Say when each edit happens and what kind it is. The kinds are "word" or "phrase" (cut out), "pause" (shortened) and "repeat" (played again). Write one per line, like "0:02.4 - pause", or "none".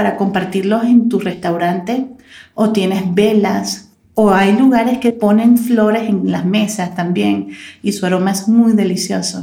none